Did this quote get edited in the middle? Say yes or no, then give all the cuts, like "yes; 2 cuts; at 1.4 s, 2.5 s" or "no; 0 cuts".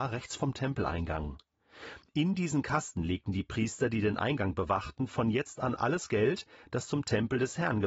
no; 0 cuts